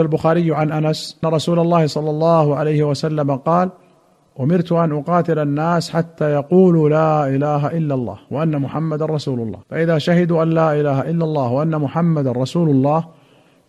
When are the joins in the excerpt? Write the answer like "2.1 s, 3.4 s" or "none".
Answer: 1.2 s, 9.6 s